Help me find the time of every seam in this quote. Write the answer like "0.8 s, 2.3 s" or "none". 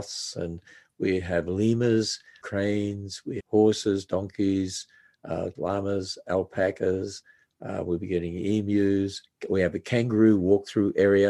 2.4 s, 3.4 s, 5.5 s